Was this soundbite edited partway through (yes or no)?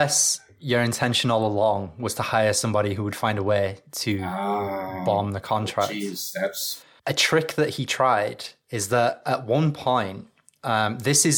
no